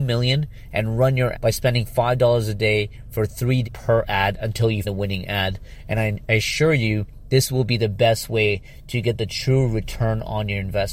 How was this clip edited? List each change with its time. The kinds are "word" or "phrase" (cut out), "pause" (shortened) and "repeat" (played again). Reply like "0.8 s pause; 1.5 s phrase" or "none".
1.3 s word; 3.6 s word; 4.8 s word